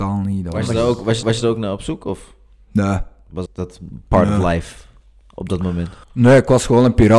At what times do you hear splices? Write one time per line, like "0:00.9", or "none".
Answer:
0:01.2
0:03.5
0:06.0